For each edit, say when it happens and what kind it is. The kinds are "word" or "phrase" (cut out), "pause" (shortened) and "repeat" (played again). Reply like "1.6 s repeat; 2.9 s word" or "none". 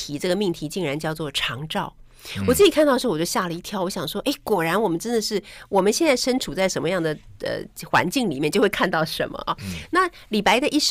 none